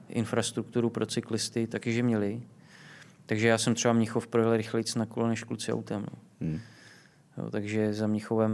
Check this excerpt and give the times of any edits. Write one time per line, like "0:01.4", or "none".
none